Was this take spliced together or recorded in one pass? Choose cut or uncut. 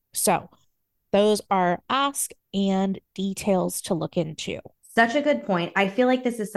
cut